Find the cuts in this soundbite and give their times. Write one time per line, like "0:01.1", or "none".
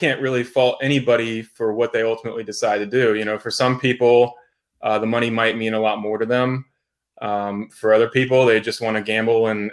none